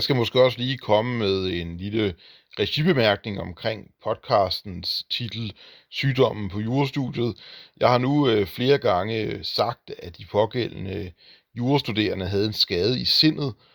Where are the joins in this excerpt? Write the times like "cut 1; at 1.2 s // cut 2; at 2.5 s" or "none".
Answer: none